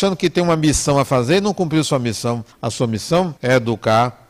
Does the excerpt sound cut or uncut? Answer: cut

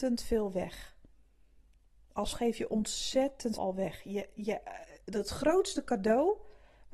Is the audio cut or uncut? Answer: cut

